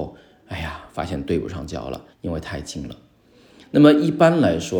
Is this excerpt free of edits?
no; 1 cut; at 2.1 s

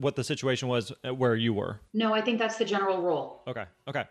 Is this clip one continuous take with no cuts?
no; 1 cut; at 1.9 s

